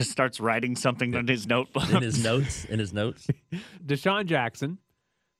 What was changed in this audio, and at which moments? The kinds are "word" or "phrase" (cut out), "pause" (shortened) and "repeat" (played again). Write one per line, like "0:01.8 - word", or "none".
0:01.1 - word
0:03.8 - word